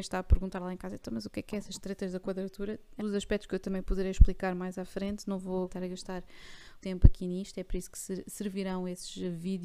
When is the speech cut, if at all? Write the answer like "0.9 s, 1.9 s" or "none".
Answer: 3.0 s, 5.7 s, 6.8 s